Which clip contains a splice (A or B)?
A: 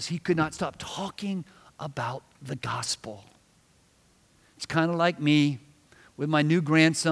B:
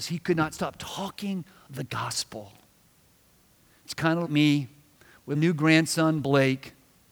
B